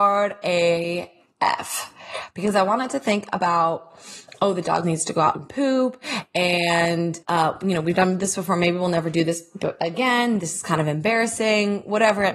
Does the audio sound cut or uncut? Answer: cut